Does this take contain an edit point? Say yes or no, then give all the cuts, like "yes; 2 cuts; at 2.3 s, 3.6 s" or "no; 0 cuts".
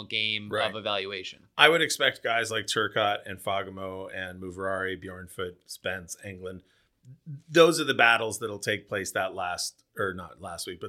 no; 0 cuts